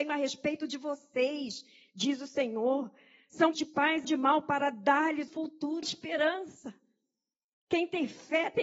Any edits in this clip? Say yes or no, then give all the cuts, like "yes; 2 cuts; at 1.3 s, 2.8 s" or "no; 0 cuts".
yes; 4 cuts; at 3.5 s, 4.0 s, 5.3 s, 5.8 s